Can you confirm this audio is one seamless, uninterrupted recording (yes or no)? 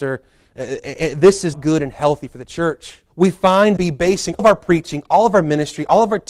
no